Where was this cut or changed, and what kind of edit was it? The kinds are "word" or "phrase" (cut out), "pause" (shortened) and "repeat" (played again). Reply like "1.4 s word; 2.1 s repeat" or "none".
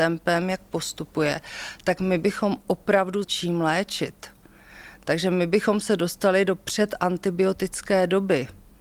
3.2 s phrase